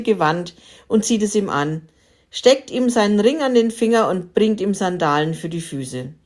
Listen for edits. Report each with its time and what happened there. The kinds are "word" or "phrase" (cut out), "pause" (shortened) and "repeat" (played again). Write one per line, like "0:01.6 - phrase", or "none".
none